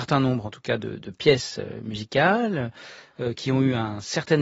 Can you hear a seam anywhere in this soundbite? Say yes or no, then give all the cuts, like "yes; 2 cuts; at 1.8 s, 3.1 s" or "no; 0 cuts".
no; 0 cuts